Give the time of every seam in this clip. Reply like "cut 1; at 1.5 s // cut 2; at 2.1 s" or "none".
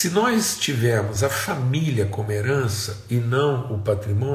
none